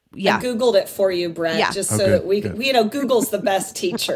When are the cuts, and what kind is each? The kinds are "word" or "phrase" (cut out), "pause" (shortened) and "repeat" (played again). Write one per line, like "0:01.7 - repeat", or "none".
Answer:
none